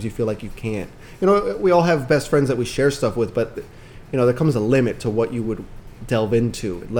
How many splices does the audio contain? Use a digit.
0